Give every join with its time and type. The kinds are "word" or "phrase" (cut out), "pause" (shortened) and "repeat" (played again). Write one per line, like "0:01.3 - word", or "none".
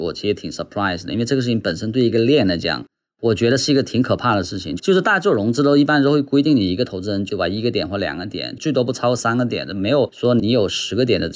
0:07.3 - word